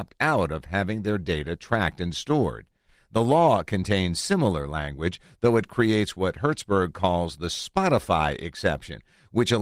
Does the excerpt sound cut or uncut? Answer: uncut